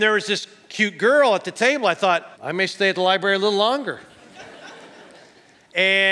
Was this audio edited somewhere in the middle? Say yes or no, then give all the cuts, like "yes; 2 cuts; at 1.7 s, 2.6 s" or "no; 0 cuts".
yes; 1 cut; at 2.3 s